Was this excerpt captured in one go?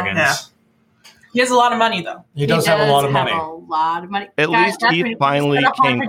yes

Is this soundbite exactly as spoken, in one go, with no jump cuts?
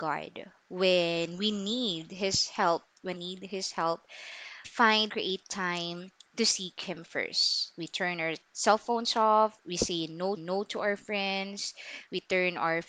no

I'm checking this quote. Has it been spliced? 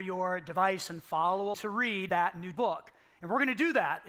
yes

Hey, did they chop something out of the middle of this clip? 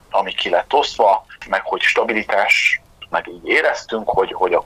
yes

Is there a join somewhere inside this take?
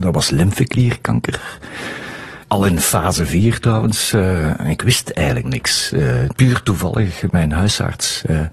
yes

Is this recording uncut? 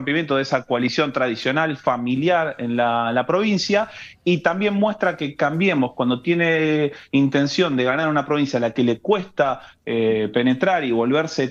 yes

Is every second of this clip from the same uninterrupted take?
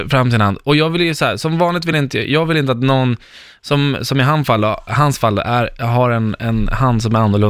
yes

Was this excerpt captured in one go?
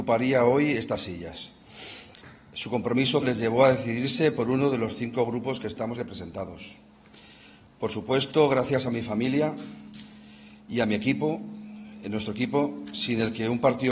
no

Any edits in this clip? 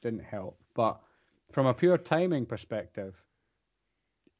no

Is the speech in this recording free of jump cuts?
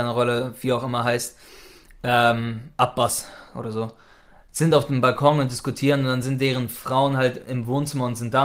yes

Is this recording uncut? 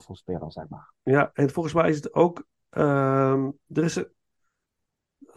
yes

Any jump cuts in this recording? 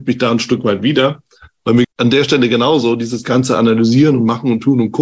yes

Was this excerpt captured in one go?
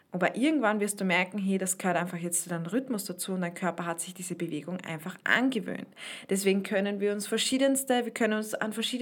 yes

